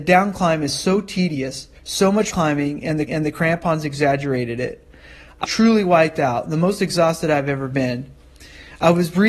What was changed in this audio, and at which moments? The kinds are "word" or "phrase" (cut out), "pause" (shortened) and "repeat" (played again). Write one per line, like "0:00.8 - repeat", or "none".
0:01.8 - pause
0:02.3 - word
0:03.1 - repeat
0:05.4 - word